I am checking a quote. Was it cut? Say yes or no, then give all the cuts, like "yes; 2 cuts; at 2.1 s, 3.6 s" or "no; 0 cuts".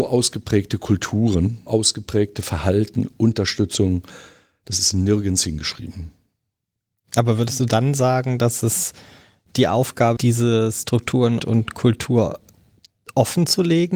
yes; 3 cuts; at 1.7 s, 10.2 s, 11.4 s